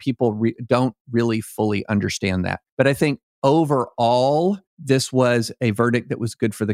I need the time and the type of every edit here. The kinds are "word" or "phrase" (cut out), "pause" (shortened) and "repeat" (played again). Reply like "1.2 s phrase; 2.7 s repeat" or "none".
2.7 s pause; 4.7 s pause